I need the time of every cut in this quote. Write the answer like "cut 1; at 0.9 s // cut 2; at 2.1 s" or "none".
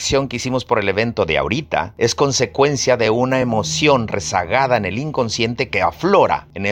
none